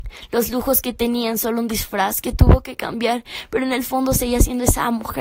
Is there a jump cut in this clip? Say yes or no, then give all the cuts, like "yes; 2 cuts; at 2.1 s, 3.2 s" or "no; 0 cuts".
no; 0 cuts